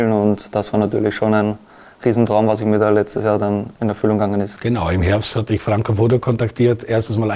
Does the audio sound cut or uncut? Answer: uncut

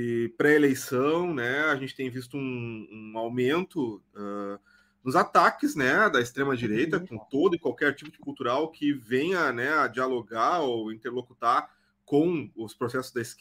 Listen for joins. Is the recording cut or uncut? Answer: cut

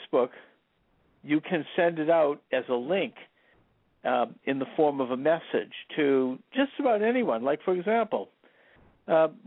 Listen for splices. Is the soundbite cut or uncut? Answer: uncut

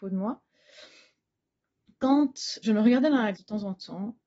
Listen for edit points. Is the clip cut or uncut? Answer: cut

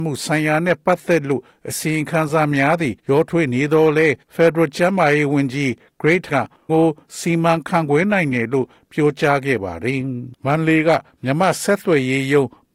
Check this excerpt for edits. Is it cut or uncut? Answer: cut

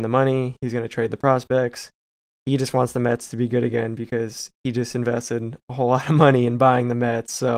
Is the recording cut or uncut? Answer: uncut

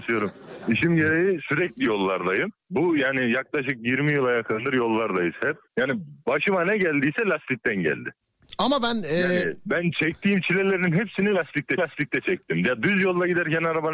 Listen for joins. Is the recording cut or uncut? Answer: cut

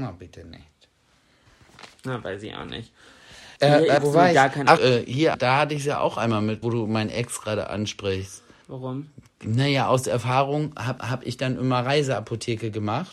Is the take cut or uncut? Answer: cut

